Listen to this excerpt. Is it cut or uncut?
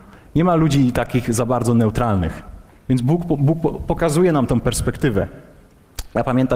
cut